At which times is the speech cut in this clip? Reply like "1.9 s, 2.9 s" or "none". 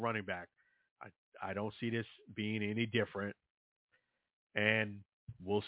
none